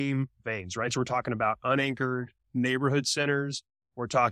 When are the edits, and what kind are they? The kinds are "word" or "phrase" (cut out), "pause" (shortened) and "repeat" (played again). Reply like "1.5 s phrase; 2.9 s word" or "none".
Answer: none

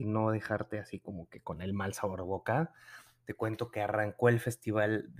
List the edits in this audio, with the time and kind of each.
none

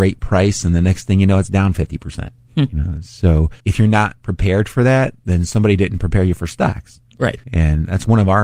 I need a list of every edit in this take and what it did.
3.6 s pause; 7.4 s pause

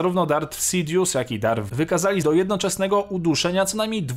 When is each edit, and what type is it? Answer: 1.7 s word; 2.2 s word

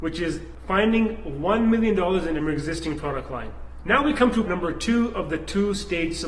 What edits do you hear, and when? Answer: 2.4 s phrase; 4.5 s word

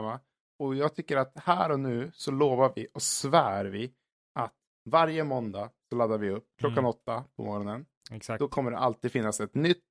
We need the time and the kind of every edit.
none

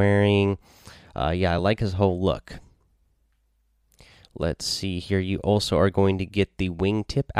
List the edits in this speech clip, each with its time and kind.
none

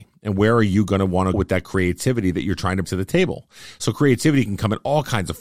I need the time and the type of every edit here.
1.3 s word; 2.8 s word

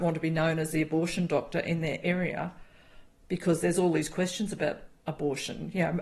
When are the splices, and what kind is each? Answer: none

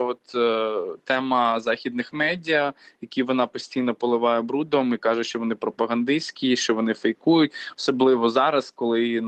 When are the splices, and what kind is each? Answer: none

